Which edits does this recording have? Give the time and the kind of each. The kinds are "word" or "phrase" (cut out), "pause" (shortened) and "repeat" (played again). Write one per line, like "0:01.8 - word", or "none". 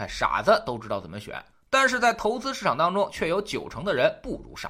none

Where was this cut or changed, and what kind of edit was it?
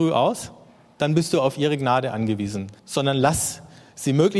0:02.8 - pause

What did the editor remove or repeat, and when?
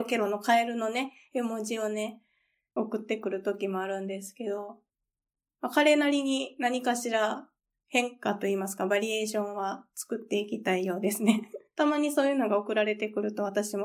none

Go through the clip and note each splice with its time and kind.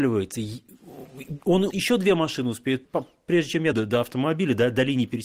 0:01.7 - word
0:02.8 - word
0:03.7 - word

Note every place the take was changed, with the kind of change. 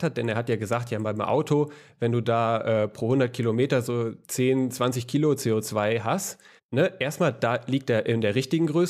0:04.2 - pause
0:06.6 - pause

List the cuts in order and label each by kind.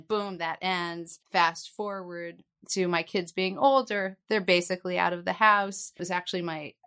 0:01.2 - pause

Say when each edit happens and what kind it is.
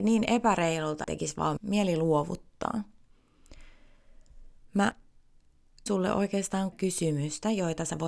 0:01.0 - word
0:01.6 - word
0:05.9 - word
0:06.7 - word

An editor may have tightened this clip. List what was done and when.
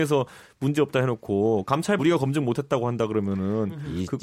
0:02.0 - word

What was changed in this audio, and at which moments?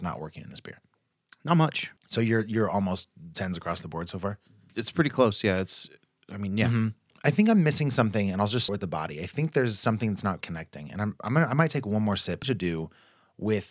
0:02.0 - pause
0:08.7 - word
0:10.4 - word
0:12.4 - phrase

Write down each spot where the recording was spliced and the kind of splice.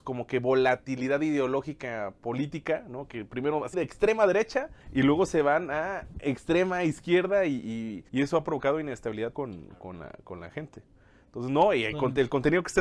0:03.7 - word
0:04.8 - pause
0:08.1 - pause
0:09.3 - word

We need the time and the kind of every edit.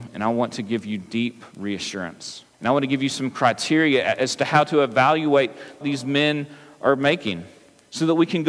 0:02.5 - pause
0:05.8 - phrase

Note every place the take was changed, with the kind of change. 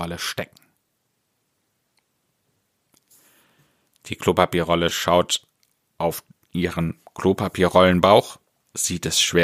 none

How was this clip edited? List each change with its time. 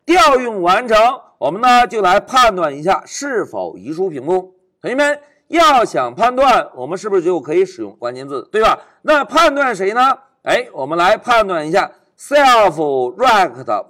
0:08.0 - word

